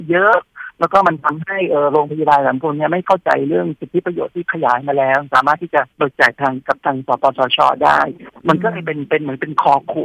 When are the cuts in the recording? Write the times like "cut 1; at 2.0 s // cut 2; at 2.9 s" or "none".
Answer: cut 1; at 5.9 s